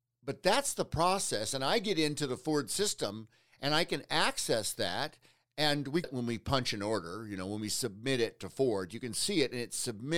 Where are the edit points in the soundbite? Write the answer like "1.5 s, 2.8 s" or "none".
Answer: 6.0 s